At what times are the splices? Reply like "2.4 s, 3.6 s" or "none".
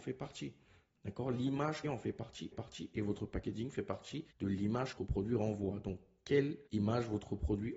1.8 s, 2.5 s, 4.3 s, 5.0 s, 6.7 s